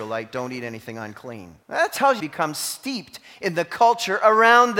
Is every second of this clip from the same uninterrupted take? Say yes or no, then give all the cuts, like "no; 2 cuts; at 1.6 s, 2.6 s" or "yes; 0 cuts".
no; 2 cuts; at 1.6 s, 2.2 s